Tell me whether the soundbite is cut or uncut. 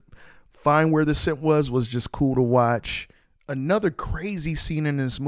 uncut